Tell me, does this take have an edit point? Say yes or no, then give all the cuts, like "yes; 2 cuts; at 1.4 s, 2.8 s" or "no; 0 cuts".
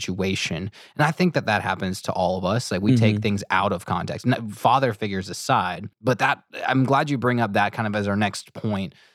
yes; 1 cut; at 5.9 s